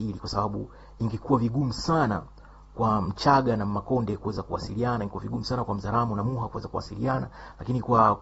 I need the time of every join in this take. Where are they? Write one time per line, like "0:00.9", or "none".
none